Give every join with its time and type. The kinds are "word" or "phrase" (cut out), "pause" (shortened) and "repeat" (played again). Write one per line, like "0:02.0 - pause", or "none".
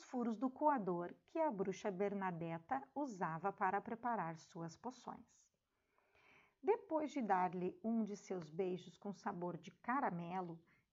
none